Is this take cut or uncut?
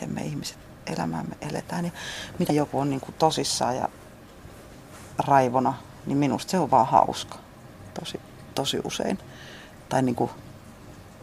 cut